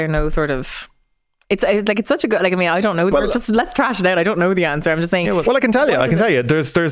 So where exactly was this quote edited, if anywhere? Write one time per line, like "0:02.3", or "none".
0:03.1